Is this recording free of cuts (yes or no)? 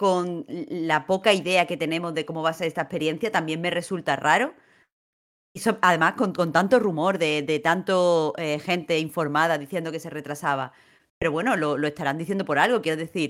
yes